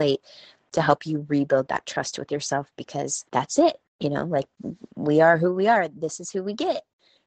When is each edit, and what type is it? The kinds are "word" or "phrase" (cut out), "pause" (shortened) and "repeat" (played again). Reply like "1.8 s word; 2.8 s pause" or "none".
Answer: 3.3 s pause

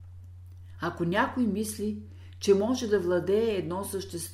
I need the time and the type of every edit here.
none

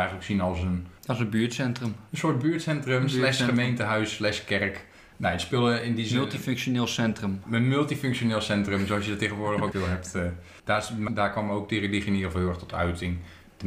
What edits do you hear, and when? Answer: 1.0 s pause; 9.7 s word; 11.1 s word

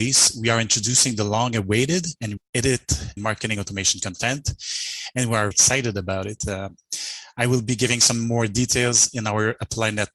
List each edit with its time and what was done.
2.4 s word; 3.2 s word; 5.5 s word

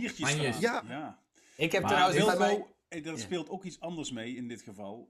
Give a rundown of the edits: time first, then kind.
none

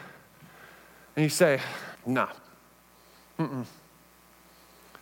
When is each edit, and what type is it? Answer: 2.0 s pause

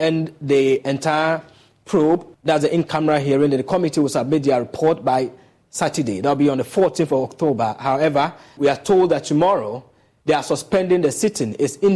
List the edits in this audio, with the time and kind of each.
2.3 s pause; 8.6 s word

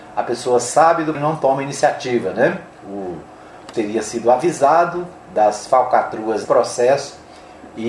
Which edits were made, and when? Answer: 1.1 s word; 3.7 s word; 6.4 s word

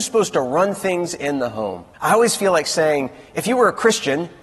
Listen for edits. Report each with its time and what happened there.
1.9 s pause

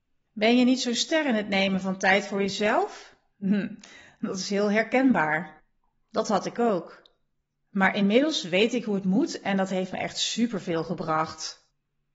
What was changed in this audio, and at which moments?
none

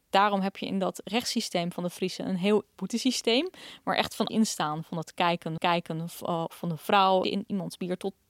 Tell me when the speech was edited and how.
2.8 s word; 4.3 s word; 5.6 s repeat; 6.5 s phrase; 7.2 s phrase

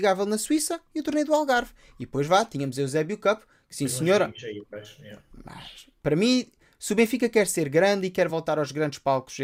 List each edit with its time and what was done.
none

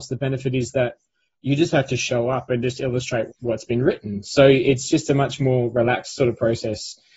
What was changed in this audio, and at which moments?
1.3 s word; 3.3 s word

